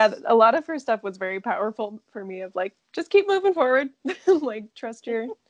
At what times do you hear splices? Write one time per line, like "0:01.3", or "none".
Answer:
0:02.8